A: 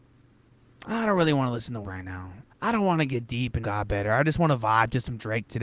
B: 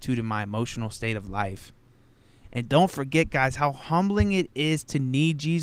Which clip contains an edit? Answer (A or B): A